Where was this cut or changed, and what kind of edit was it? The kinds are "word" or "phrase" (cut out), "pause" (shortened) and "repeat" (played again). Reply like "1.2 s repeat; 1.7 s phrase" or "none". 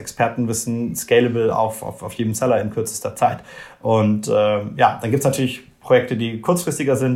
none